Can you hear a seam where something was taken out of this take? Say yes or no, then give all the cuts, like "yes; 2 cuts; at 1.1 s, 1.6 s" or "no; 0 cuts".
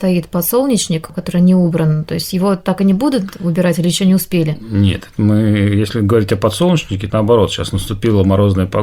yes; 1 cut; at 7.1 s